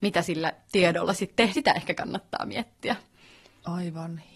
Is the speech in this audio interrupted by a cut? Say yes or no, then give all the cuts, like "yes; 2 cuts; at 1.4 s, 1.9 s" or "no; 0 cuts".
yes; 1 cut; at 1.5 s